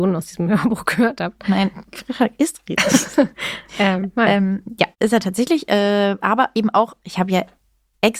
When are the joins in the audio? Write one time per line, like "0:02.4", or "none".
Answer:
0:03.3
0:04.9